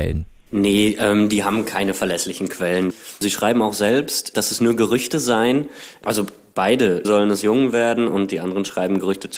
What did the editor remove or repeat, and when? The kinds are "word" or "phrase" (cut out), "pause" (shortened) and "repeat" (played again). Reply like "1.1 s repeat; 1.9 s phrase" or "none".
7.0 s phrase